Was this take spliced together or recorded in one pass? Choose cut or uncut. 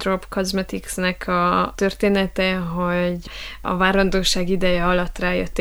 uncut